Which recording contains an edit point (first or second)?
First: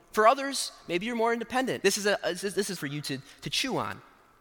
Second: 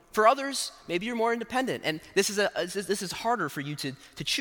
first